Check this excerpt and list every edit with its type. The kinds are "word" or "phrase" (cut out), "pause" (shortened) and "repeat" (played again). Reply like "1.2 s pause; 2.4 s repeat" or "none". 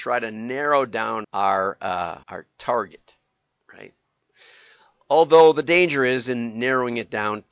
1.2 s word; 2.2 s pause